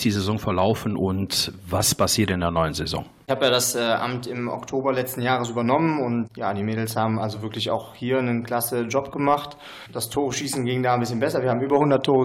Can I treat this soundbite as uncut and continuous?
yes; 0 cuts

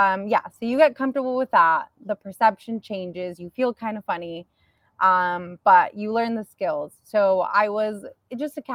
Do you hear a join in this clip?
no; 0 cuts

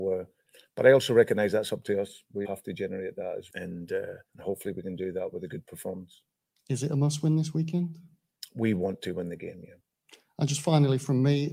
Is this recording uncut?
no; 3 cuts; at 2.4 s, 3.5 s, 4.3 s

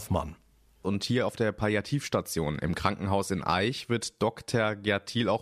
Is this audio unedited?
yes; 0 cuts

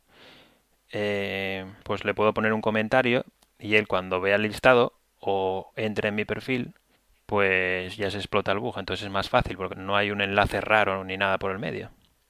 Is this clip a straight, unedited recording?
no; 3 cuts; at 1.8 s, 6.9 s, 9.7 s

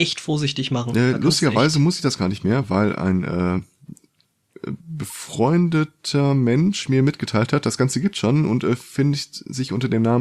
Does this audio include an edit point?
no; 0 cuts

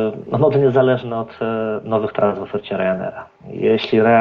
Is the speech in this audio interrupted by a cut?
no; 0 cuts

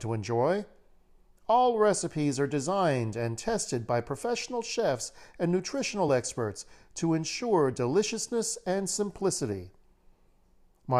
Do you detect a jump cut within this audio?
no; 0 cuts

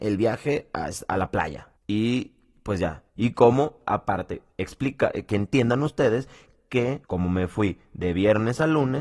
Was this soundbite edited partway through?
yes; 4 cuts; at 1.8 s, 3.1 s, 4.5 s, 7.0 s

